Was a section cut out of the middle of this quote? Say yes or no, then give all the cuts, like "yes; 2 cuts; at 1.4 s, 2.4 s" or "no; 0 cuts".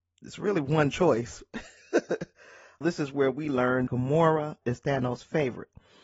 yes; 3 cuts; at 2.8 s, 3.9 s, 4.6 s